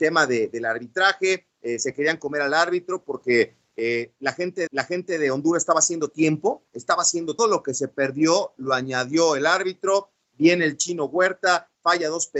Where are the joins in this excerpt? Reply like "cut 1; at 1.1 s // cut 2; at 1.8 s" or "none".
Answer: cut 1; at 4.7 s // cut 2; at 7.4 s